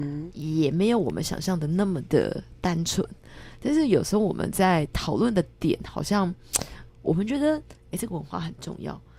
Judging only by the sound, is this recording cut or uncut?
cut